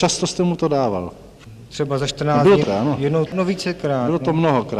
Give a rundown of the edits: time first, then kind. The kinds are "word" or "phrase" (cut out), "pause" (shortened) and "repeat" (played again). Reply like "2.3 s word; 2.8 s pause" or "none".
2.6 s word; 3.3 s word